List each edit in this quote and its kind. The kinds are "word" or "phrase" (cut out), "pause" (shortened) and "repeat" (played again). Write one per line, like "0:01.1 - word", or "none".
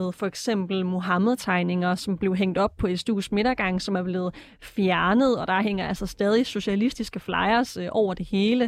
none